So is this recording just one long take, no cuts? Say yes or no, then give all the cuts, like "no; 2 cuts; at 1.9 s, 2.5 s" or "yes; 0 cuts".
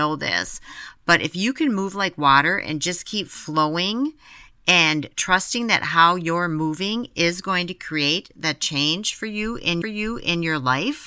no; 1 cut; at 9.8 s